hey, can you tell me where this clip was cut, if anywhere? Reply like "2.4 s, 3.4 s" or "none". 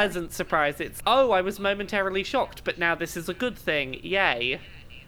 1.0 s